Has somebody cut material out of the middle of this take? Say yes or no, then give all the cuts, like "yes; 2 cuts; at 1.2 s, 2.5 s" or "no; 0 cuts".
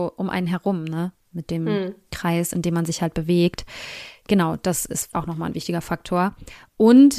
yes; 1 cut; at 5.1 s